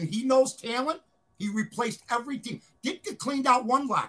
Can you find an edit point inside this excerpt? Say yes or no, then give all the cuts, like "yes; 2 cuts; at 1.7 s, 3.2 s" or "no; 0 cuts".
no; 0 cuts